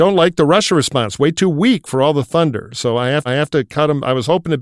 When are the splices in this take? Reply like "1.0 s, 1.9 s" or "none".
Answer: 3.3 s